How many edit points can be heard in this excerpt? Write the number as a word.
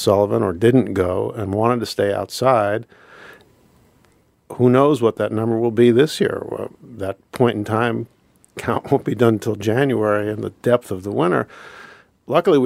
zero